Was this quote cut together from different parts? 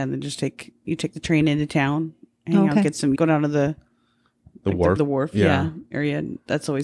yes; 2 cuts; at 3.1 s, 5.0 s

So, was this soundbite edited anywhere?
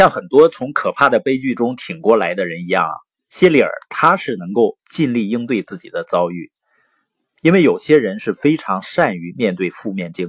no; 0 cuts

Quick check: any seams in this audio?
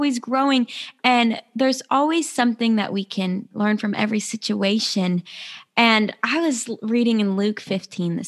no; 0 cuts

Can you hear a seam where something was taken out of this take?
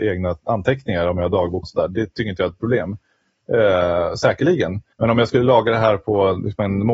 yes; 3 cuts; at 1.6 s, 2.6 s, 4.9 s

